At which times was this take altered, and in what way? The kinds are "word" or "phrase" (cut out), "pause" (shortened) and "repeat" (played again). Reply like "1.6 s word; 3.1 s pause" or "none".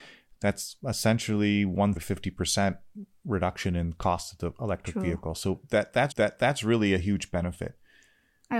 2.0 s word; 6.1 s repeat